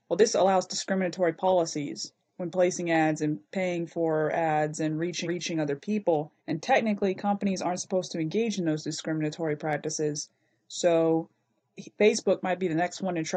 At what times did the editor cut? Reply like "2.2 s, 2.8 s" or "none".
5.3 s, 6.4 s

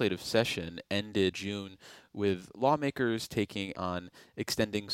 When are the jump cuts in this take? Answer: 1.3 s, 3.7 s

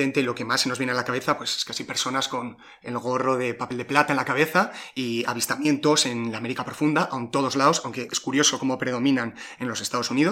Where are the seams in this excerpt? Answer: none

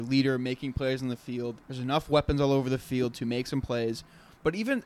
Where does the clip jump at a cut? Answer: 1.6 s

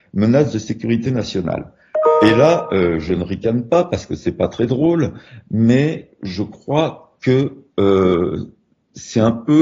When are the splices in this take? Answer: none

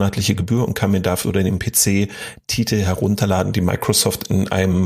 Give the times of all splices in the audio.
1.2 s

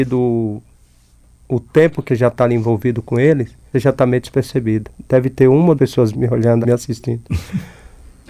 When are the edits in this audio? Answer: 2.1 s, 3.7 s, 5.8 s, 6.1 s, 6.6 s

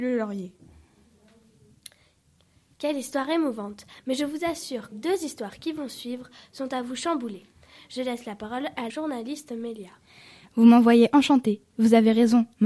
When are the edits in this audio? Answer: 4.9 s, 8.9 s

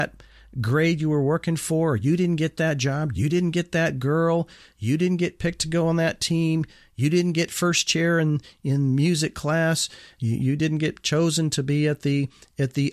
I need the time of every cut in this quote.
none

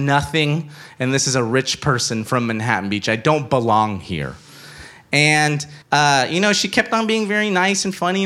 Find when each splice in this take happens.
5.8 s

